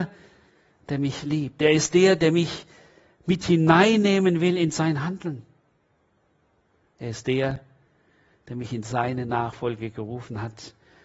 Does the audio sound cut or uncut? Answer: uncut